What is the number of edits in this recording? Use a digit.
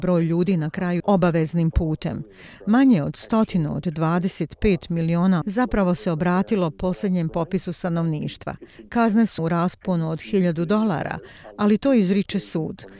3